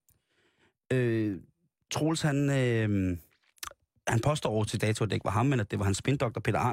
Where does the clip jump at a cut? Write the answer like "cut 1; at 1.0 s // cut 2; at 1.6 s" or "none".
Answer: cut 1; at 4.8 s

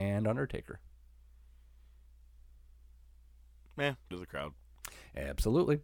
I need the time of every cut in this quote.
cut 1; at 4.1 s

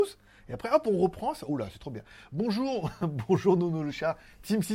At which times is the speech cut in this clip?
none

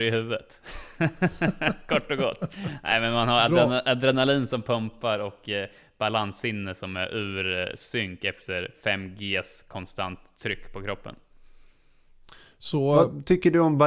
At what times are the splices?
none

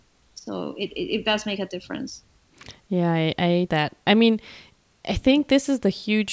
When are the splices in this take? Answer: cut 1; at 3.7 s

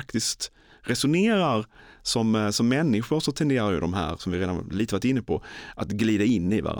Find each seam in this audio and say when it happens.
none

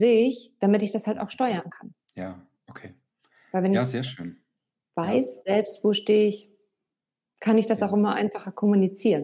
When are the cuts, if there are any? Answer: none

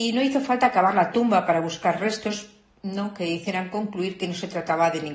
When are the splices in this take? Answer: none

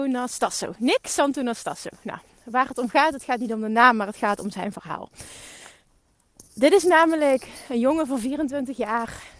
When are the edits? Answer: none

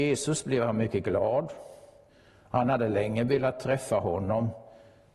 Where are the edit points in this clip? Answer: none

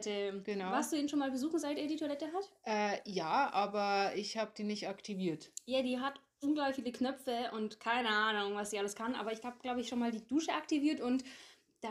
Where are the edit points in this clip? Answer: none

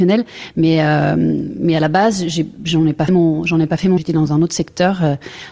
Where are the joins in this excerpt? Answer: cut 1; at 3.1 s // cut 2; at 4.0 s

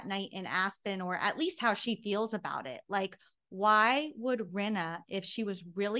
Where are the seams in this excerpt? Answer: none

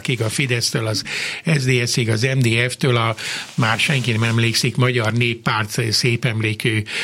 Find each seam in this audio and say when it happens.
none

